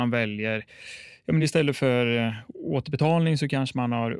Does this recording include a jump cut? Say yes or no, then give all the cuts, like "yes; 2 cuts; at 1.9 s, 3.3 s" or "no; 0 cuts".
no; 0 cuts